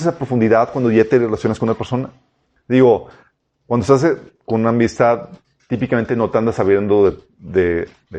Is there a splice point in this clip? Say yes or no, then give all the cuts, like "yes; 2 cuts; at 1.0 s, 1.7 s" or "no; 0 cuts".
no; 0 cuts